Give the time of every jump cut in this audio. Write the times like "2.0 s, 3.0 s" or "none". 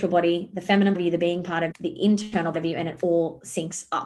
0.9 s, 1.7 s, 2.5 s